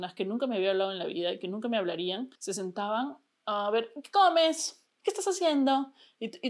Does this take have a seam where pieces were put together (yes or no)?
yes